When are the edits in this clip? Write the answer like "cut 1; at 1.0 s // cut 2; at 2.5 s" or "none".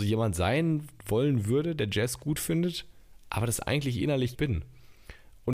cut 1; at 4.3 s